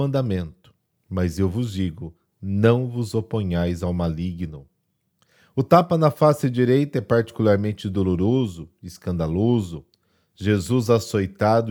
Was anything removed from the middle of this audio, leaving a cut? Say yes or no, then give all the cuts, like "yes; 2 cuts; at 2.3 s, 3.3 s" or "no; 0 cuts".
no; 0 cuts